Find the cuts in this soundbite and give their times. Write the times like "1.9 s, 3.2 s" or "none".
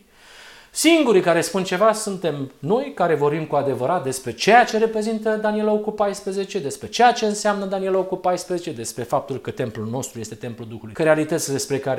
10.9 s